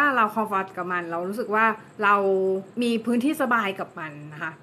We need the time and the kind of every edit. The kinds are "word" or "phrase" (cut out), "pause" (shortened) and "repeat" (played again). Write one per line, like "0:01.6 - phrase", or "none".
0:01.9 - pause
0:02.7 - pause